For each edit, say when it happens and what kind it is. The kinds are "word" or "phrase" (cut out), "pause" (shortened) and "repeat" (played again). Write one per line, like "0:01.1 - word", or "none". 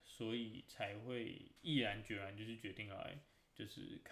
0:01.6 - pause